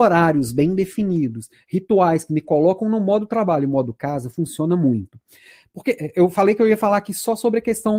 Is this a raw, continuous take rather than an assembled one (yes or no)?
yes